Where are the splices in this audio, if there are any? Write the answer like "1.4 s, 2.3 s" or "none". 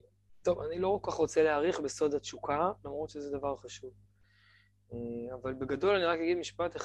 none